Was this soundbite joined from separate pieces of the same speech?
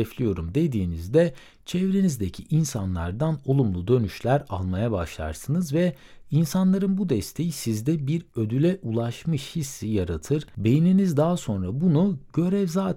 no; 0 cuts

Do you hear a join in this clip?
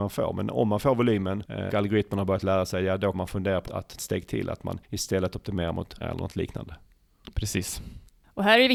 yes; 6 cuts; at 1.7 s, 3.1 s, 3.7 s, 4.0 s, 4.8 s, 6.0 s

